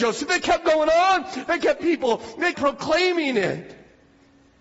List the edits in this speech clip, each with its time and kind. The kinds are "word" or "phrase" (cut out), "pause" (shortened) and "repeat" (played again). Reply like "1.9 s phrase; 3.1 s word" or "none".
1.8 s word; 2.5 s word